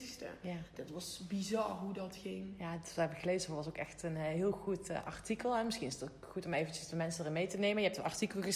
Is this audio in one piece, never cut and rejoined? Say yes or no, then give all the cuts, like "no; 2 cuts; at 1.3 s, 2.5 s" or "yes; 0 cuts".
yes; 0 cuts